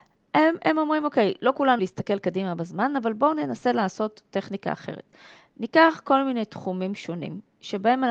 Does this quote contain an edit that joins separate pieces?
yes; 1 cut; at 1.8 s

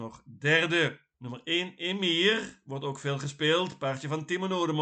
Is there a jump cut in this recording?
yes; 1 cut; at 1.1 s

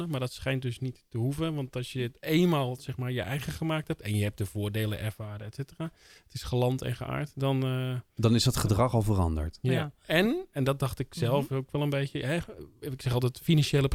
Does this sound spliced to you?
no; 0 cuts

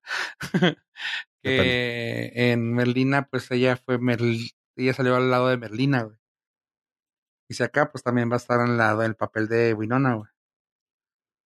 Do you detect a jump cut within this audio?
no; 0 cuts

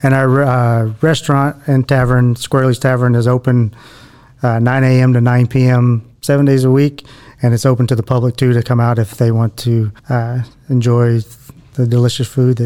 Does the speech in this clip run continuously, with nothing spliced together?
no; 1 cut; at 10.0 s

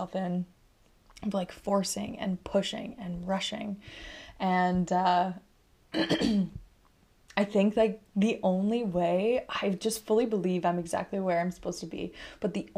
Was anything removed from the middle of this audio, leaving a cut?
no; 0 cuts

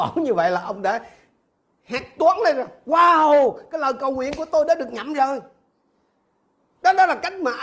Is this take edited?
no; 0 cuts

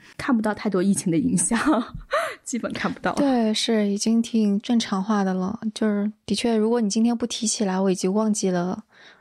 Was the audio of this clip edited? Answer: no; 0 cuts

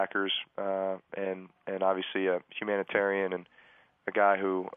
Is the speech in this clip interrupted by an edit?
no; 0 cuts

